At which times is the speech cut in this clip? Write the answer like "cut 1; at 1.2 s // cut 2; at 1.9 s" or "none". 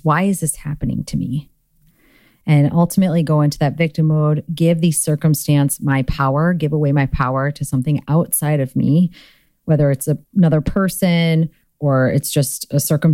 none